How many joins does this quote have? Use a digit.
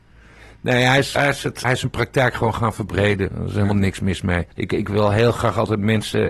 3